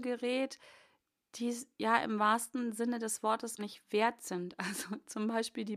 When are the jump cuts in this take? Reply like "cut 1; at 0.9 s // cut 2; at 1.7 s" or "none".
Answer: cut 1; at 3.6 s